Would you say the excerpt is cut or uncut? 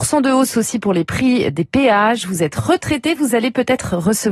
uncut